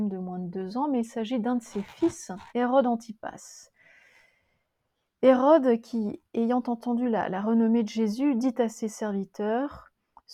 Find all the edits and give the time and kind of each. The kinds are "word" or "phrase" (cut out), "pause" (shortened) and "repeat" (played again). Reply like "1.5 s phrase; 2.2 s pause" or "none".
2.5 s pause